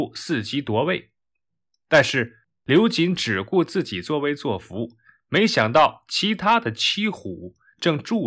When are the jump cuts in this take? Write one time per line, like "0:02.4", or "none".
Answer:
none

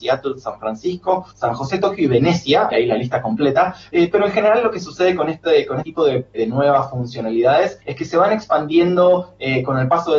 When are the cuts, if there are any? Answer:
0:01.3
0:02.7
0:05.8
0:06.3
0:07.8

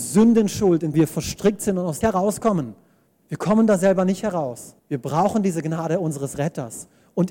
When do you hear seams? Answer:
0:00.9
0:02.0
0:03.1
0:04.8

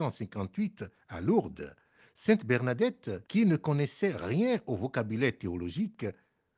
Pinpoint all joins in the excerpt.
0:03.3

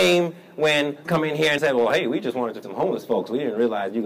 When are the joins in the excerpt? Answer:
0:01.0
0:01.6
0:02.6

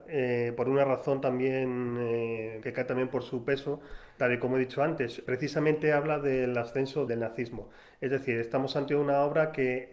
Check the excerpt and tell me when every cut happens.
0:02.6
0:04.2
0:05.2
0:07.1

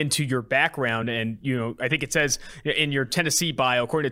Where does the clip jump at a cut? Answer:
none

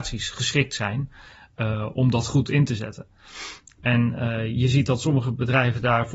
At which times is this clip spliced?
0:01.9

